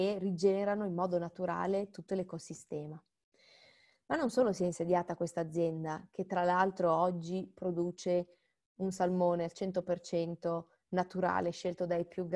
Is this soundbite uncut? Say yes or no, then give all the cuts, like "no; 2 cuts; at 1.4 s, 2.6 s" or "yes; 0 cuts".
yes; 0 cuts